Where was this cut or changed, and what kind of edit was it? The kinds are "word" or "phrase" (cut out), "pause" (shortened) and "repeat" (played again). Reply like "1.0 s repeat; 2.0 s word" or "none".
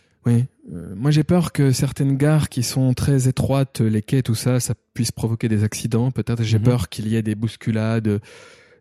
none